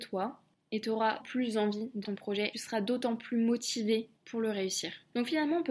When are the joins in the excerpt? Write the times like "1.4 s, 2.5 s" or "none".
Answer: 1.2 s, 2.0 s, 2.5 s, 4.2 s